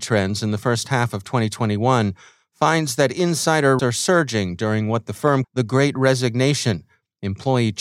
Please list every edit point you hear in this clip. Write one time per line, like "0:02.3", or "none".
0:03.8
0:05.4